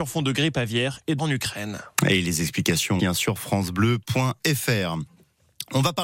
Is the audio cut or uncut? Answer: cut